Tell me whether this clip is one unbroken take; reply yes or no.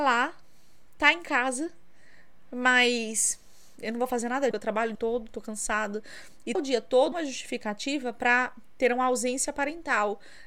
no